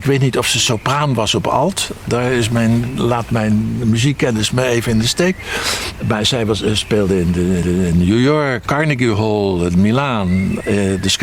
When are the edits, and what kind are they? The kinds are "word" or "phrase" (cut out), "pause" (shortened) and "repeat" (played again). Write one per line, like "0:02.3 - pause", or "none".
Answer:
0:07.6 - repeat
0:08.7 - word